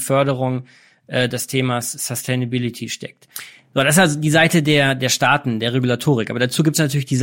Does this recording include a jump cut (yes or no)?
no